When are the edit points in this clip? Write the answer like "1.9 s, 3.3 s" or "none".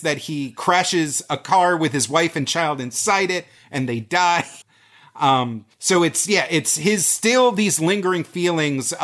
4.6 s, 5.7 s